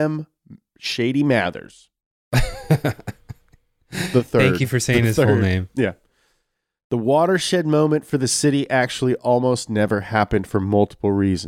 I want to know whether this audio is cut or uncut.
uncut